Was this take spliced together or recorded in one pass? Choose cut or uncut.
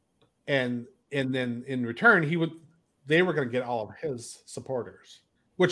uncut